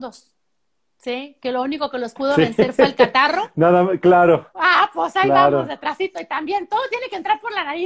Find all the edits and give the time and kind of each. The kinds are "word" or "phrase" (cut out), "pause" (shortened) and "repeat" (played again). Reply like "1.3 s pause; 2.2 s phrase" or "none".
none

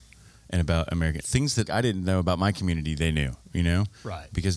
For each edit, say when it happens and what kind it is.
1.2 s word; 1.7 s word

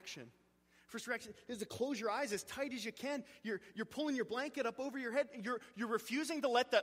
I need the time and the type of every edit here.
none

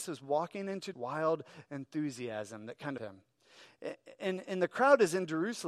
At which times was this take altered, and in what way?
0.9 s phrase; 3.0 s phrase

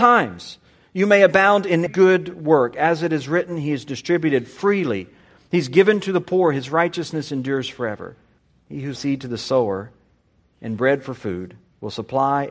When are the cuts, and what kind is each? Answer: 1.9 s word; 8.4 s pause; 9.0 s word

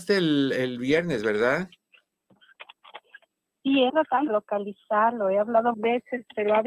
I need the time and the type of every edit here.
3.9 s word; 4.3 s word; 5.7 s word

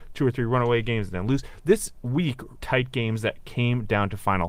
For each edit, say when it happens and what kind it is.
2.6 s word

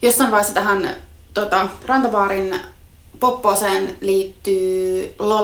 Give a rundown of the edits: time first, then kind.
none

